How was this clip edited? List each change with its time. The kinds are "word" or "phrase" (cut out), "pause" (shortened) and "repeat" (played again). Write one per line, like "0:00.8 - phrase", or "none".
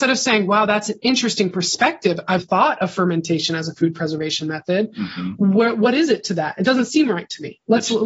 0:02.4 - word